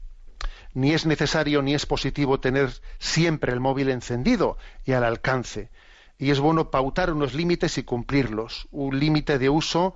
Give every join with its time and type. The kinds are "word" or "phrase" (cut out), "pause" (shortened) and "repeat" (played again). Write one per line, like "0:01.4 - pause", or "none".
none